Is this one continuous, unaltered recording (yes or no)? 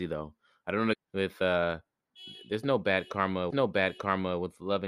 no